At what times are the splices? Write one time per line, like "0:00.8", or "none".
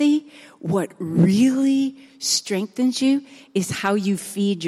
none